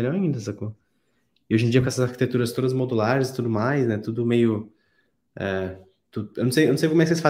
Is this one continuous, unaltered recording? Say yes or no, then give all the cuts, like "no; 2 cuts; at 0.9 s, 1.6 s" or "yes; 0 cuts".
yes; 0 cuts